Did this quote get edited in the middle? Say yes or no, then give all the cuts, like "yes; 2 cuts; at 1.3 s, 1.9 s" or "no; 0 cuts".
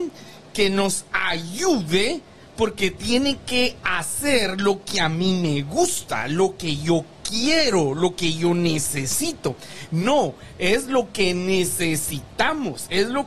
no; 0 cuts